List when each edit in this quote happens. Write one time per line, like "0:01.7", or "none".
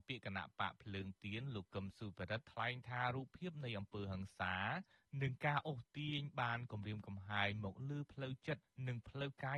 none

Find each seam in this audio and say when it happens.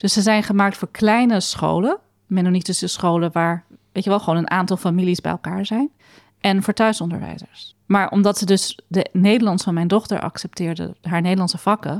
none

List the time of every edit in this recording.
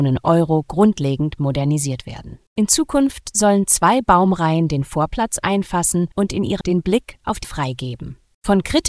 0:02.5
0:06.1
0:06.6
0:07.4

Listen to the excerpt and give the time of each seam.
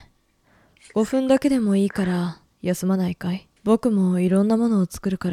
0:03.6

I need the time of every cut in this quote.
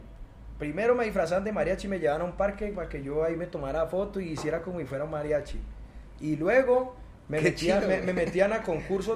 none

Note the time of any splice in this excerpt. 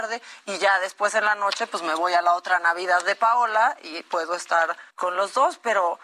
0:04.9

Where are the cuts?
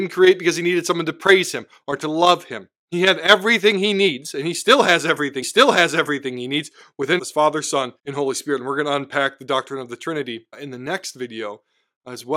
0:05.4
0:07.2
0:08.0
0:10.5

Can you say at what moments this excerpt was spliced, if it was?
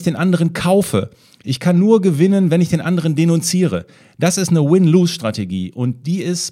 none

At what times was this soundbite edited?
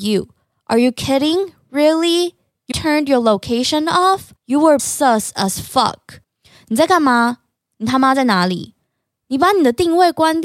0:02.7
0:04.4
0:04.8
0:06.2

